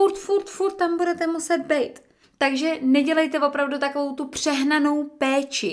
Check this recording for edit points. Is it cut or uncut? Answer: cut